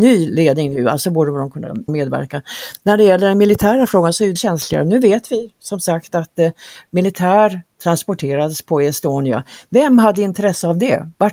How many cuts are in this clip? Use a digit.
3